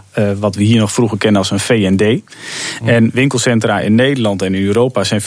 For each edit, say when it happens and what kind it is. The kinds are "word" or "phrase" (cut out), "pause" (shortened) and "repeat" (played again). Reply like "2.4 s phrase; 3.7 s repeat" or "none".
none